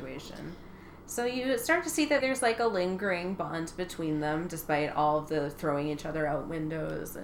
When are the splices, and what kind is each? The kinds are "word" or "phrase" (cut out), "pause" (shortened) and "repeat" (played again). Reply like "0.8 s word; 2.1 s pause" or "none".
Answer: 2.2 s word